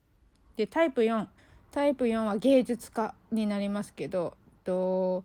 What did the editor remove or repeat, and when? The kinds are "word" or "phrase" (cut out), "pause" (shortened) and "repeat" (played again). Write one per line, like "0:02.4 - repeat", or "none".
0:01.4 - pause